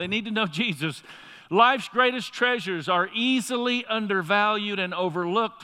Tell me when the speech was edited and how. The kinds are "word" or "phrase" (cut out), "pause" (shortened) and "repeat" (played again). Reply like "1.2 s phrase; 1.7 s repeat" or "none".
none